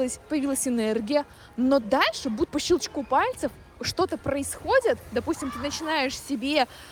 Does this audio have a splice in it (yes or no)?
yes